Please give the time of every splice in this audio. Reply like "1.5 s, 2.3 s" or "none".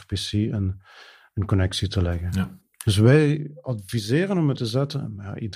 4.6 s